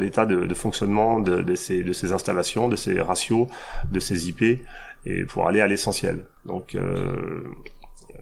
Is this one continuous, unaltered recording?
no; 1 cut; at 5.3 s

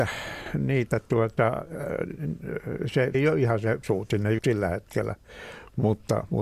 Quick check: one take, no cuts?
no; 3 cuts; at 3.1 s, 3.8 s, 4.4 s

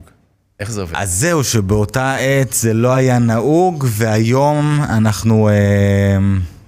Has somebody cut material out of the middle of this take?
no; 0 cuts

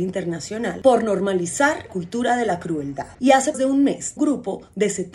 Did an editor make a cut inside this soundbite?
yes; 4 cuts; at 1.9 s, 3.1 s, 3.5 s, 4.2 s

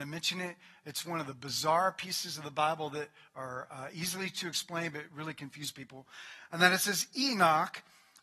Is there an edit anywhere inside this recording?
no; 0 cuts

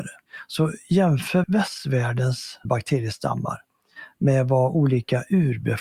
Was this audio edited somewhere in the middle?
yes; 2 cuts; at 1.4 s, 2.6 s

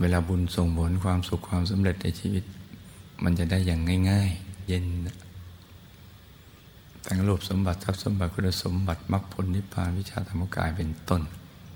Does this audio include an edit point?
yes; 1 cut; at 4.7 s

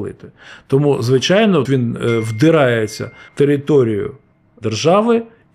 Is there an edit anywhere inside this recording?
yes; 2 cuts; at 1.7 s, 3.3 s

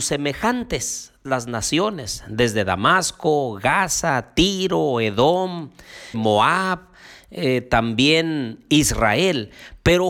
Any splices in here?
yes; 2 cuts; at 1.3 s, 6.1 s

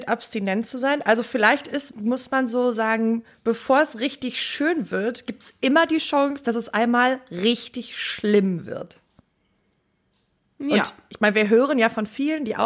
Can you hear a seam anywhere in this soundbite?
no; 0 cuts

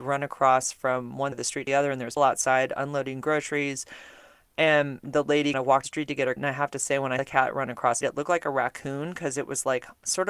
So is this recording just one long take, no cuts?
no; 8 cuts; at 1.3 s, 1.7 s, 2.2 s, 5.5 s, 5.8 s, 6.4 s, 7.2 s, 8.0 s

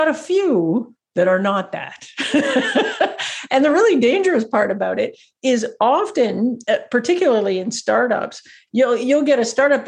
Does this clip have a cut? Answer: no; 0 cuts

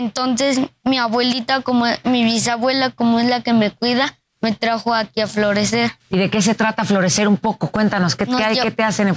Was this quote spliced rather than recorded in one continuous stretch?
yes; 1 cut; at 6.0 s

